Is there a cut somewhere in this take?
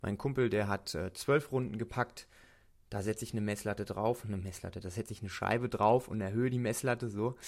no; 0 cuts

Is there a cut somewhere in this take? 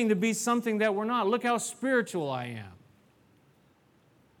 no; 0 cuts

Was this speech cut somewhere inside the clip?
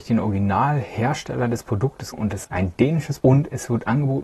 yes; 3 cuts; at 2.1 s, 2.4 s, 3.2 s

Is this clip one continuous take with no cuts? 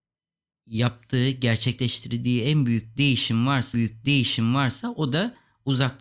no; 1 cut; at 3.7 s

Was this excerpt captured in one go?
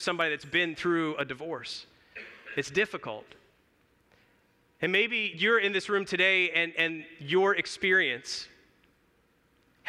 yes; 0 cuts

